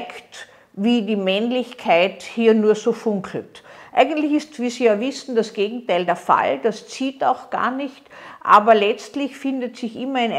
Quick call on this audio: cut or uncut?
uncut